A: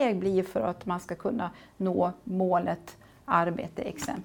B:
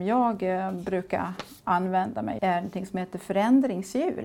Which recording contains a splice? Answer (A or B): B